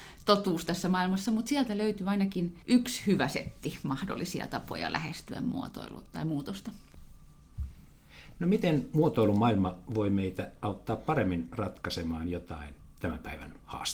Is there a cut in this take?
yes; 1 cut; at 2.6 s

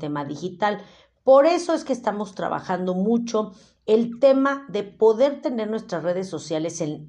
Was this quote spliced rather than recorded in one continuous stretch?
no; 0 cuts

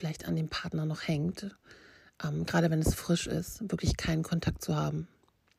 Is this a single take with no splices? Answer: yes; 0 cuts

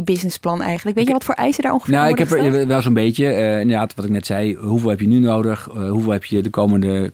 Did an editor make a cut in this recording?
no; 0 cuts

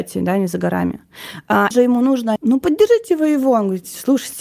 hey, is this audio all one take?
no; 2 cuts; at 1.7 s, 2.4 s

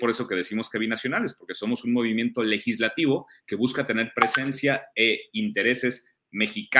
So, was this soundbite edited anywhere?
no; 0 cuts

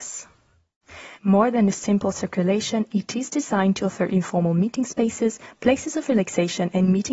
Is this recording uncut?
no; 1 cut; at 1.1 s

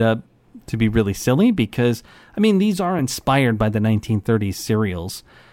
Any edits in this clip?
no; 0 cuts

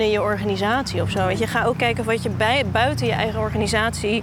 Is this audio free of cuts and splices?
yes; 0 cuts

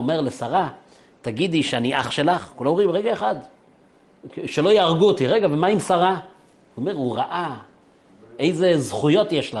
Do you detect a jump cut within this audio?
no; 0 cuts

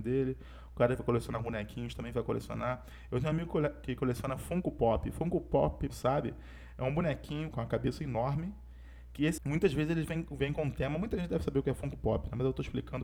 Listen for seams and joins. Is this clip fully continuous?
no; 3 cuts; at 5.9 s, 7.5 s, 9.4 s

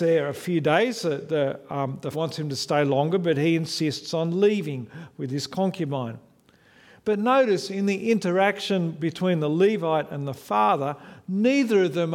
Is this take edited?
yes; 1 cut; at 2.1 s

